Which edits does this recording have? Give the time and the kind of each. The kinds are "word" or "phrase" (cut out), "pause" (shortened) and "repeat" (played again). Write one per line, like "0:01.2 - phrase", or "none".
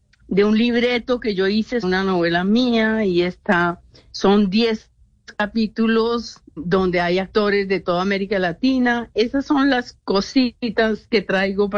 0:01.8 - word
0:06.6 - word

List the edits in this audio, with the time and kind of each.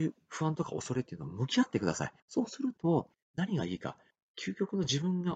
0:02.2 - pause
0:03.1 - pause
0:04.1 - pause

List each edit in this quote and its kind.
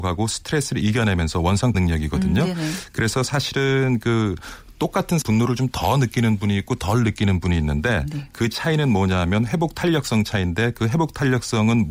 0:01.7 - word
0:05.2 - word

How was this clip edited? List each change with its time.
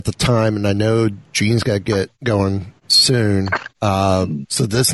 none

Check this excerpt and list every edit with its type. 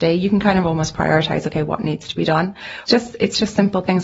0:02.9 - phrase

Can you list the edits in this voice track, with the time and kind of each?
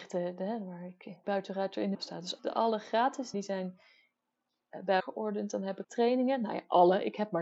0:01.2 - word
0:01.9 - word
0:02.4 - word
0:03.3 - word
0:05.0 - word
0:05.8 - word

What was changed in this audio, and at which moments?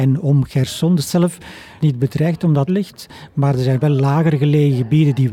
0:01.0 - word
0:01.8 - word
0:02.7 - phrase

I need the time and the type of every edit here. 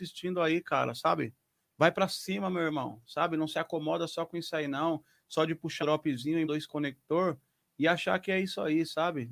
0:05.8 - word
0:06.4 - word

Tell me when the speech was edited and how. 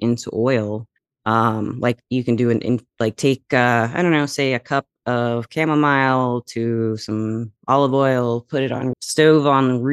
0:01.0 - pause
0:08.9 - word

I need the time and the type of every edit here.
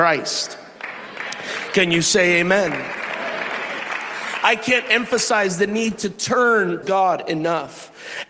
0:06.8 - word

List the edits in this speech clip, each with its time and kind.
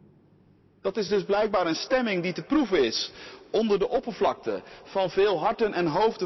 none

